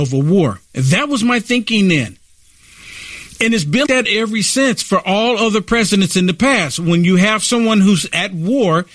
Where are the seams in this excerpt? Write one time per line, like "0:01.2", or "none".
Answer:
0:03.9